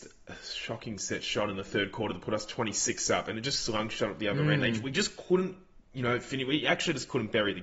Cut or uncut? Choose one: uncut